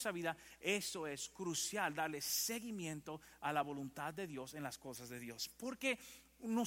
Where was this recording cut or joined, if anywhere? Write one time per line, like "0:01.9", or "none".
none